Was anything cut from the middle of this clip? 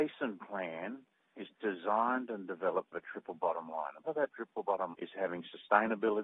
yes; 3 cuts; at 2.9 s, 4.1 s, 4.9 s

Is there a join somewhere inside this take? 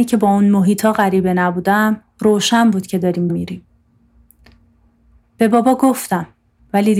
yes; 1 cut; at 3.3 s

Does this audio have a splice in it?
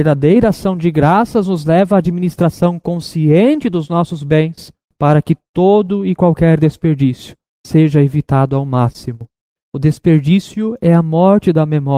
no; 0 cuts

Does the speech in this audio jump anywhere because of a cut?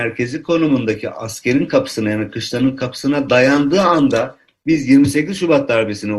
no; 0 cuts

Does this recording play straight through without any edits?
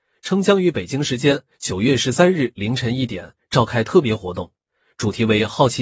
yes; 0 cuts

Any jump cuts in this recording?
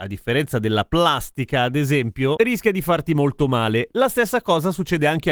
no; 0 cuts

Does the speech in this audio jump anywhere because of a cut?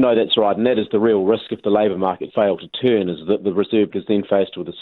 yes; 2 cuts; at 2.3 s, 3.9 s

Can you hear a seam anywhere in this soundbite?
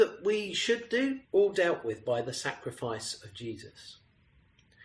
yes; 1 cut; at 1.2 s

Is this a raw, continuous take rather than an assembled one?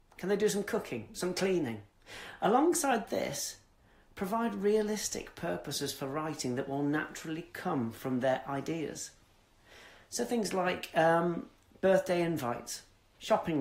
yes; 0 cuts

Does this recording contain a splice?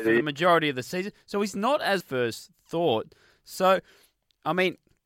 yes; 1 cut; at 2.0 s

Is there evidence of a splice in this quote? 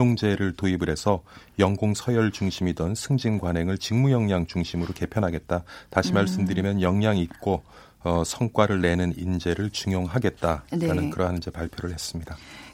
no; 0 cuts

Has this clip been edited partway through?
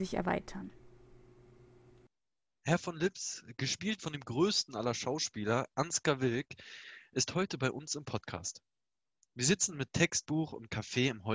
no; 0 cuts

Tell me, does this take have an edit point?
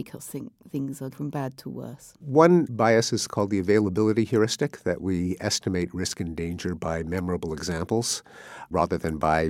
yes; 1 cut; at 1.1 s

